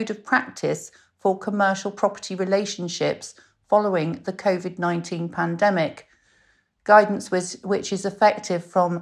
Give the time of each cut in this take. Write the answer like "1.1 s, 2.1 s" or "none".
none